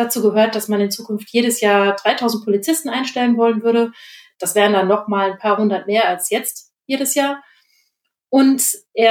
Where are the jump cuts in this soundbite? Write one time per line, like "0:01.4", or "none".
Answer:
none